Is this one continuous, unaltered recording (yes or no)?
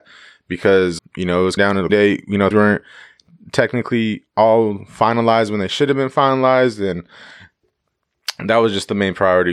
no